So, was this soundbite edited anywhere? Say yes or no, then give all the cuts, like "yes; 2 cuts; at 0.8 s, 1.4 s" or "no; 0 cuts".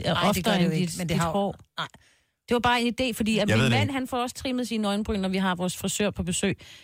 no; 0 cuts